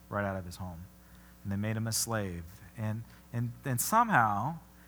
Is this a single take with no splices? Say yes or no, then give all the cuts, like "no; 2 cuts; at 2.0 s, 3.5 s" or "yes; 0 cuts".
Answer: yes; 0 cuts